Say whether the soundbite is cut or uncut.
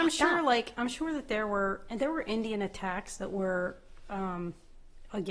uncut